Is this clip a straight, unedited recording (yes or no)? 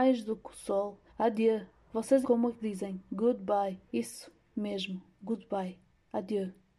no